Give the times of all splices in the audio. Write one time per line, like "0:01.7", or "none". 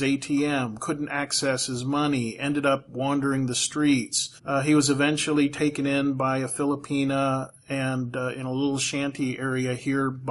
0:04.4